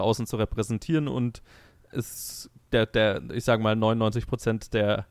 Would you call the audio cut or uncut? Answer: uncut